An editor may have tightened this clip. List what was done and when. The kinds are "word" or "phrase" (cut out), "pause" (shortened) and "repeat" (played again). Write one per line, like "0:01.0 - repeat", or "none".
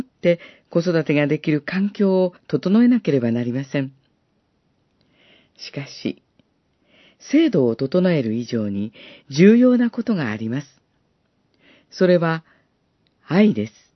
0:02.4 - pause